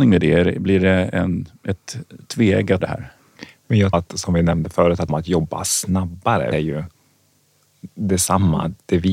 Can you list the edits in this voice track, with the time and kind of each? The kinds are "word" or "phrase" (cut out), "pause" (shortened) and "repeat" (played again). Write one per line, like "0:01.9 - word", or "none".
0:02.8 - word
0:03.9 - phrase
0:05.1 - phrase
0:06.5 - phrase

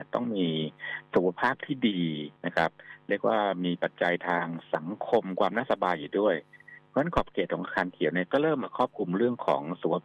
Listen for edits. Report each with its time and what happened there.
0:02.4 - pause

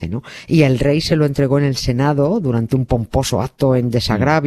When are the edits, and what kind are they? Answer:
none

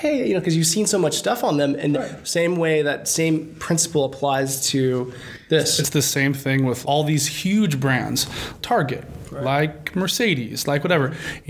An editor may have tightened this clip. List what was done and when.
0:01.9 - word
0:06.8 - word
0:08.6 - word

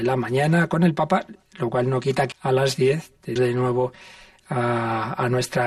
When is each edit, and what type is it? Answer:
0:02.3 - word
0:03.4 - word

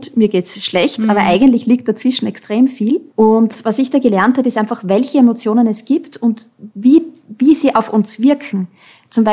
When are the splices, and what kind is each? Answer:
0:03.1 - pause

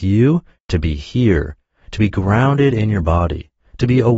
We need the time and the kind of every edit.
none

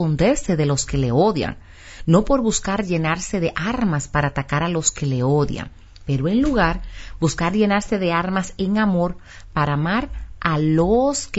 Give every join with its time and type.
none

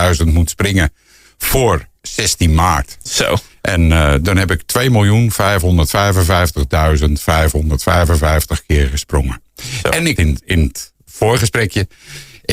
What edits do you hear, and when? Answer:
0:10.2 - phrase

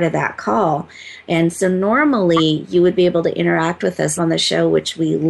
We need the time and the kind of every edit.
0:04.2 - word

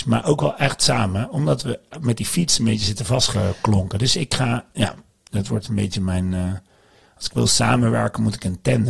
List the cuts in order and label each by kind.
none

